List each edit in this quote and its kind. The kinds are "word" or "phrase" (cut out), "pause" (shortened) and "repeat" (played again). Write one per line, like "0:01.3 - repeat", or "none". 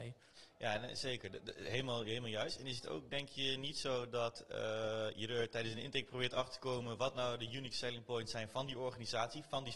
none